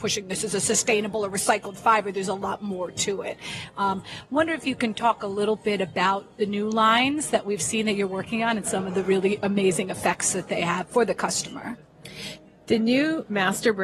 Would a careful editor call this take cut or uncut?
uncut